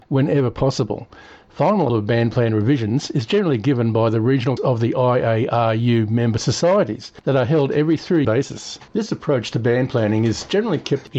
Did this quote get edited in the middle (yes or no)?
yes